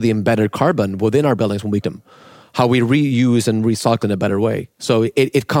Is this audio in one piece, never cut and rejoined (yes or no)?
no